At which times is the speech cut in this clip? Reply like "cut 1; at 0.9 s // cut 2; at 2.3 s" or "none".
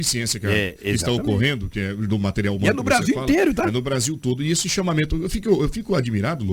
none